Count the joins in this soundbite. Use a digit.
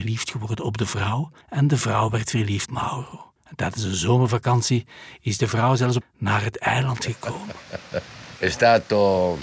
4